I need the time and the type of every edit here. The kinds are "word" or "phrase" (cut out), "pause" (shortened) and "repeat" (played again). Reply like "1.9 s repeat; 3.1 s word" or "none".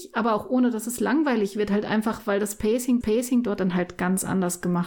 3.0 s repeat